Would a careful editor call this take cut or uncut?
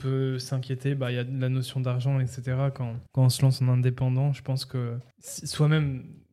cut